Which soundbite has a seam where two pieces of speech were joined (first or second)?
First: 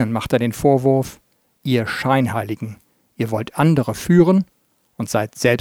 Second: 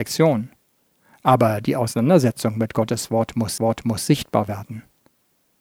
second